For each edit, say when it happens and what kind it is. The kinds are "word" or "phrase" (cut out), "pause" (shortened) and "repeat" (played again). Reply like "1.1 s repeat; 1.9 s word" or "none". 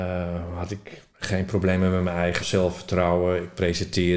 1.1 s pause; 2.4 s word